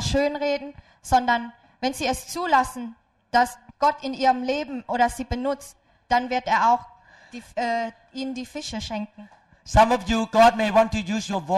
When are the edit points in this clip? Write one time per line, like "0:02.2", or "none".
none